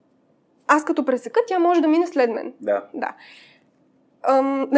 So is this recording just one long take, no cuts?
yes; 0 cuts

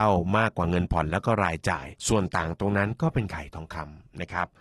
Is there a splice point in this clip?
yes; 1 cut; at 2.0 s

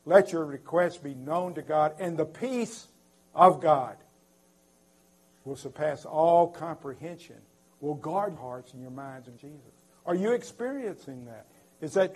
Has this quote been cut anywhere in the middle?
yes; 2 cuts; at 8.4 s, 9.4 s

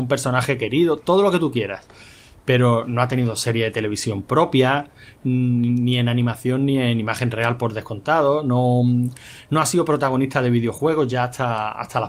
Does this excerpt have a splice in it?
no; 0 cuts

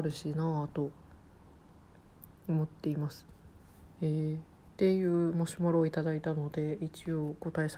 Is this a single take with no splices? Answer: no; 1 cut; at 4.7 s

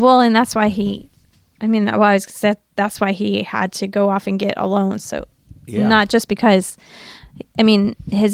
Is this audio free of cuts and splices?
yes; 0 cuts

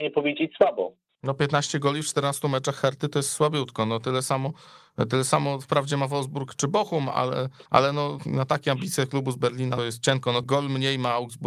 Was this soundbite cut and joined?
yes; 4 cuts; at 7.7 s, 8.2 s, 9.8 s, 10.4 s

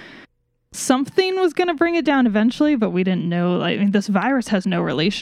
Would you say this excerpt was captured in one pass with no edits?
yes; 0 cuts

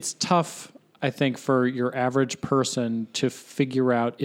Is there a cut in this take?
no; 0 cuts

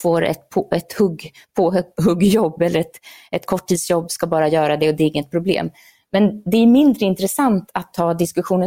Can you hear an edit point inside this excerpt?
no; 0 cuts

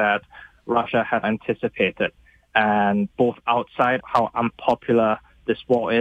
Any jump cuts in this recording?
yes; 3 cuts; at 1.2 s, 3.1 s, 4.0 s

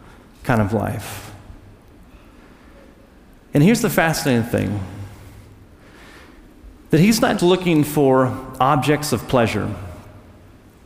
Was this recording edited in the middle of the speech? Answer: yes; 1 cut; at 7.4 s

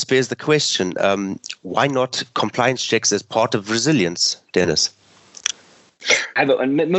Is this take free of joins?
yes; 0 cuts

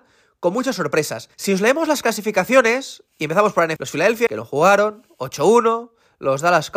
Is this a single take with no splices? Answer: no; 4 cuts; at 1.3 s, 3.1 s, 3.8 s, 4.3 s

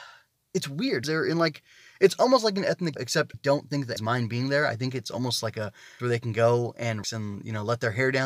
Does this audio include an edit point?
yes; 6 cuts; at 1.0 s, 3.0 s, 3.3 s, 4.0 s, 6.0 s, 7.0 s

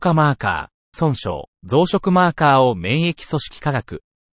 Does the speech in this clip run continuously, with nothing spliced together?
no; 2 cuts; at 0.9 s, 1.5 s

